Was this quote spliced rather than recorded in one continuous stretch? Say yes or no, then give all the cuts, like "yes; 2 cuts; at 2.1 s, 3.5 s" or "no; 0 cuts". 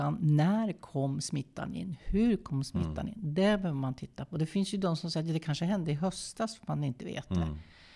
no; 0 cuts